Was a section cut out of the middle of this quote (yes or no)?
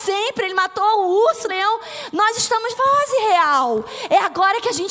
yes